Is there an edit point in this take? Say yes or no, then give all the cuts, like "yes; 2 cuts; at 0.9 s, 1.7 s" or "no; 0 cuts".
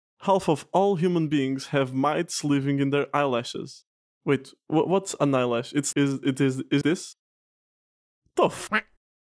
yes; 2 cuts; at 5.9 s, 6.8 s